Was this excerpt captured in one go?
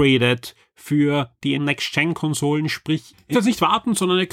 no; 2 cuts; at 1.6 s, 3.3 s

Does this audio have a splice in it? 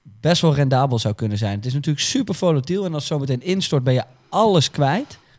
no; 0 cuts

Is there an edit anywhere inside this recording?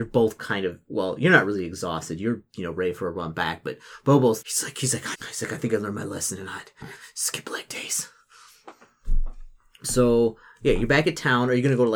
yes; 2 cuts; at 4.4 s, 5.1 s

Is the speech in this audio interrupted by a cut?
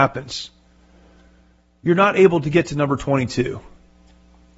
no; 0 cuts

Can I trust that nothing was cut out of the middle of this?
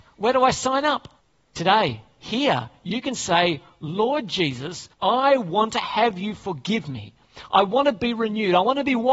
no; 2 cuts; at 1.2 s, 4.9 s

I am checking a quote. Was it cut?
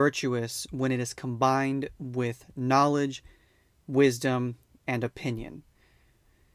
no; 0 cuts

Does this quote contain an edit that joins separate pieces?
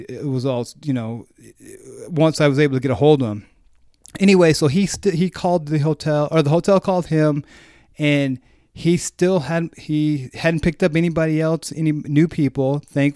no; 0 cuts

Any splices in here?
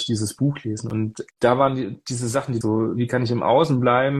yes; 2 cuts; at 1.3 s, 2.6 s

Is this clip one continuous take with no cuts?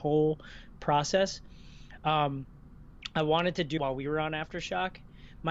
no; 1 cut; at 3.8 s

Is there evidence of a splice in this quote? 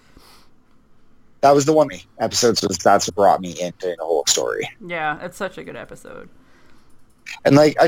yes; 4 cuts; at 1.9 s, 2.5 s, 3.1 s, 4.0 s

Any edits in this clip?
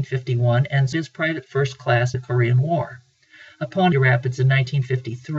yes; 3 cuts; at 0.9 s, 2.1 s, 3.9 s

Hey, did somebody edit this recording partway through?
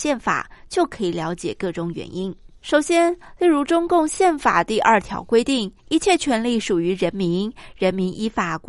yes; 2 cuts; at 2.6 s, 5.8 s

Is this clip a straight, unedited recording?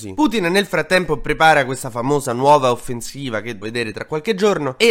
no; 1 cut; at 3.6 s

